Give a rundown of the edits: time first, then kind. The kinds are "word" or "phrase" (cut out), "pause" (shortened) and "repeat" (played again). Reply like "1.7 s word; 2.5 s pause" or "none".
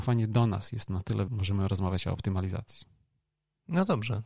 1.3 s word